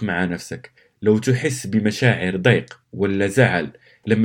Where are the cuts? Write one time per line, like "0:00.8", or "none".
0:02.8